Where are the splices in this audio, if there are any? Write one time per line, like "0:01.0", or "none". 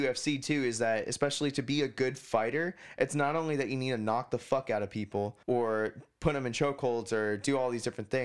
0:05.4